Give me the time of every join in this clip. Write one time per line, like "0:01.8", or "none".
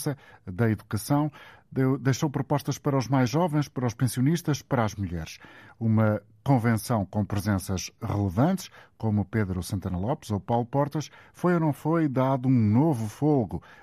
none